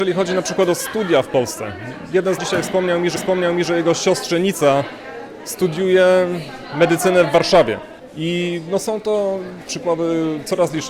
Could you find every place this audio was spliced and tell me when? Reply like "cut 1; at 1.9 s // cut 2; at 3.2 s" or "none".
cut 1; at 2.4 s // cut 2; at 3.2 s // cut 3; at 9.7 s